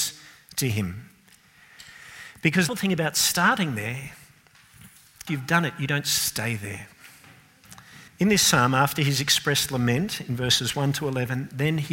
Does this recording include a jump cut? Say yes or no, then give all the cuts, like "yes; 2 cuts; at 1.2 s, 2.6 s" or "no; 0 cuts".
yes; 3 cuts; at 2.7 s, 5.3 s, 8.1 s